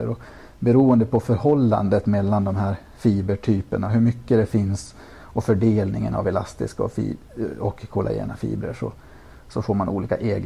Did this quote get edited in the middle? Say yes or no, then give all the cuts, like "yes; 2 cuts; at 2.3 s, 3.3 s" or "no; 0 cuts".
no; 0 cuts